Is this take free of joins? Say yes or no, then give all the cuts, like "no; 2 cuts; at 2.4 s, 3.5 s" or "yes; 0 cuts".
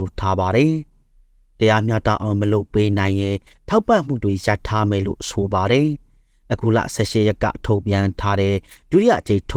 yes; 0 cuts